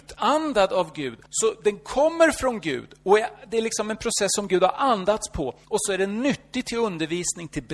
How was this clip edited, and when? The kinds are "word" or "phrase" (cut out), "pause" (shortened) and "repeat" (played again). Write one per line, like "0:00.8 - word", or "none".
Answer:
0:01.3 - pause
0:05.6 - pause

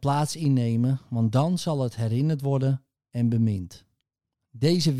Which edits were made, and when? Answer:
none

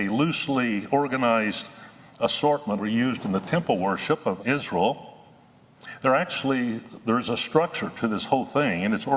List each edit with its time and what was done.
0:02.8 - phrase
0:04.4 - word

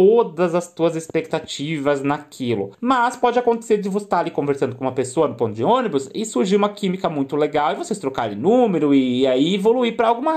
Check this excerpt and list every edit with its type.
0:02.7 - pause

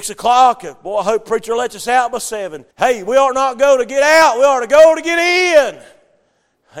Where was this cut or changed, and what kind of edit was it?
0:02.7 - pause

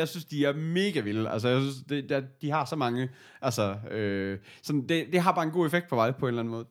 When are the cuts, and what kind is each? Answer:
none

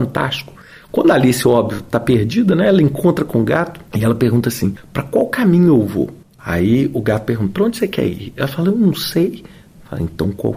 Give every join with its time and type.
0:03.9 - pause
0:06.2 - pause

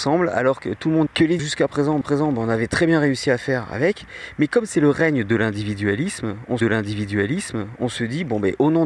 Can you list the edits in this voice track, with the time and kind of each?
0:01.1 - phrase
0:01.4 - word
0:02.0 - repeat
0:06.6 - repeat

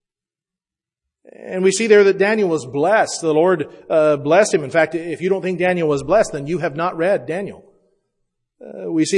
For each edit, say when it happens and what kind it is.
none

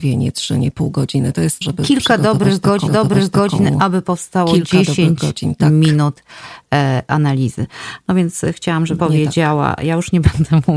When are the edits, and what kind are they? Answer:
0:01.6 - phrase
0:02.9 - repeat
0:09.0 - word

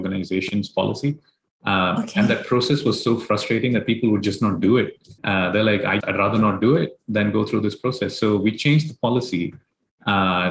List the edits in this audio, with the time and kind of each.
0:05.2 - pause
0:06.0 - word

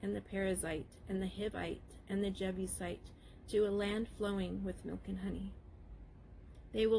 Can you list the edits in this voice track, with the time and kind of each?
none

